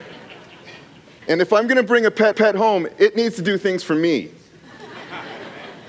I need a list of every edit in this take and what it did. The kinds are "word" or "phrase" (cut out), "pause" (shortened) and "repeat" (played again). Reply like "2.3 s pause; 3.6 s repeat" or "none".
2.3 s repeat